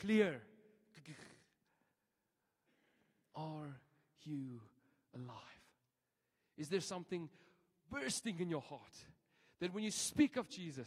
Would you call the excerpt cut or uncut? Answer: uncut